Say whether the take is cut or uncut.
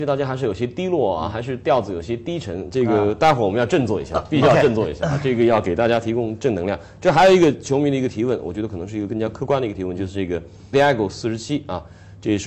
cut